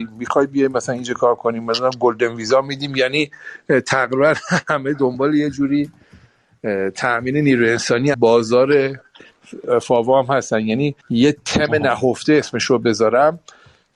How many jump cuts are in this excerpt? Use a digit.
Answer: 2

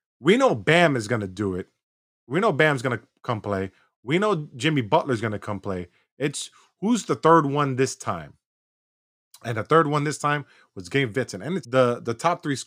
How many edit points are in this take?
1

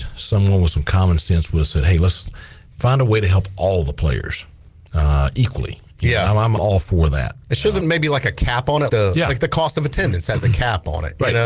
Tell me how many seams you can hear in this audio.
3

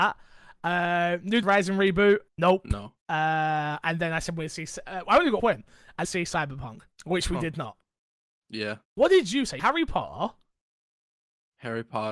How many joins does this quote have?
8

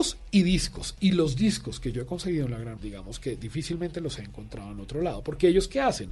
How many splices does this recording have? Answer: 1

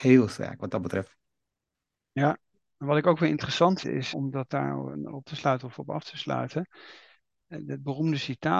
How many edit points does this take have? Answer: 5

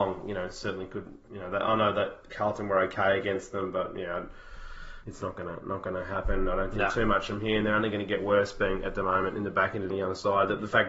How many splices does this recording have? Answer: 1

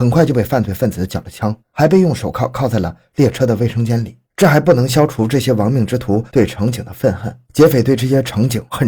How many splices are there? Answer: 3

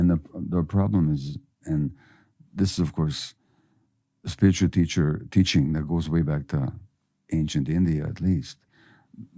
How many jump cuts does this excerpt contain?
1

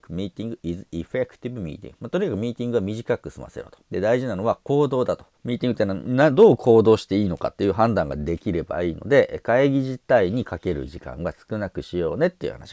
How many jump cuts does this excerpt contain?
2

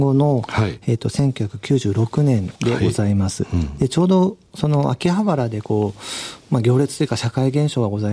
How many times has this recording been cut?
1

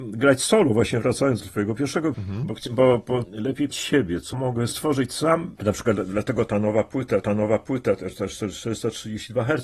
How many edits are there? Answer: 7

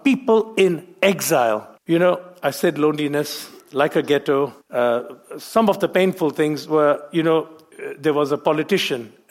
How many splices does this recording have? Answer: 3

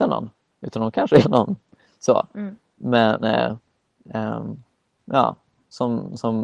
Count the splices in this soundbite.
2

